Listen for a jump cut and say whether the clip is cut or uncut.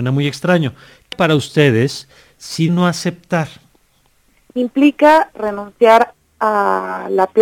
cut